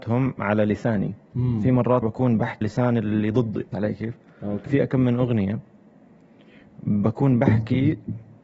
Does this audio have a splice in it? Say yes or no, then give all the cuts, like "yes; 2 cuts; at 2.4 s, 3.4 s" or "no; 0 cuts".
yes; 4 cuts; at 2.0 s, 2.6 s, 3.7 s, 4.7 s